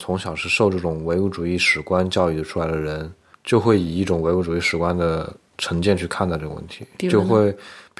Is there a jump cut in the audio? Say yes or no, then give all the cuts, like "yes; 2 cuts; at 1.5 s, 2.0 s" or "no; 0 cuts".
no; 0 cuts